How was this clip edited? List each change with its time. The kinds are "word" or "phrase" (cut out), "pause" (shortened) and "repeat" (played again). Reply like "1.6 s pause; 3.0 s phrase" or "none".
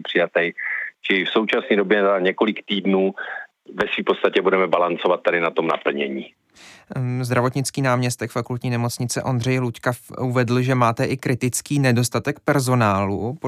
none